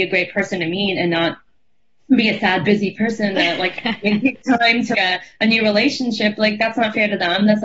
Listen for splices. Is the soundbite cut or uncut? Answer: cut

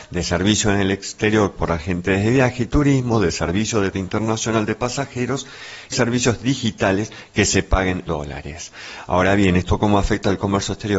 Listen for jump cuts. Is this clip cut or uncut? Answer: cut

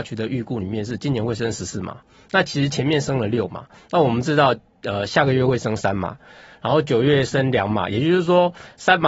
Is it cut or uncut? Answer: uncut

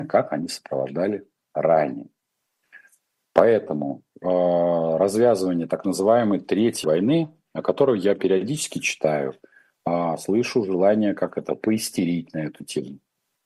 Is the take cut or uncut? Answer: cut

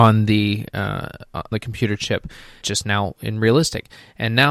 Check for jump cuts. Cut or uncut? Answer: cut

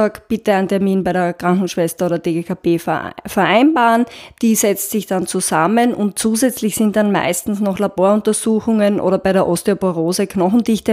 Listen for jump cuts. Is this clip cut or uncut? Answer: uncut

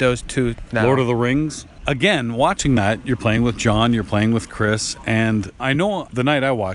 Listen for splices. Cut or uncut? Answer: uncut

